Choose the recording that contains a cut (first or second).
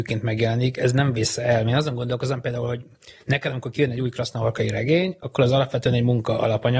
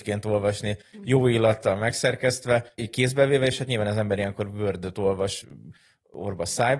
second